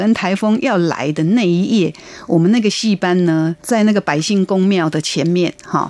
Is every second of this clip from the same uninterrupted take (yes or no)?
no